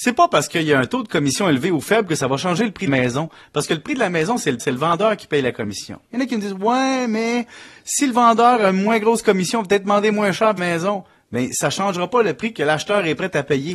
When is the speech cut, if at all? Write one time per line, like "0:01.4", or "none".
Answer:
0:02.9
0:04.6
0:10.6